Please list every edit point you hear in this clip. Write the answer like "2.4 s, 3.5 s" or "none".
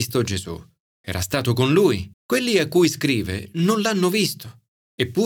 2.1 s